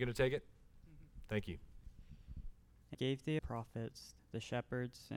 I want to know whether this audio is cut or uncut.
cut